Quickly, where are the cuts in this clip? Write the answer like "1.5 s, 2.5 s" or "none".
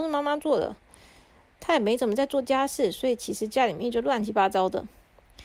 1.6 s